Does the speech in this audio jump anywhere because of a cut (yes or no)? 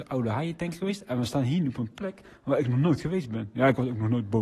no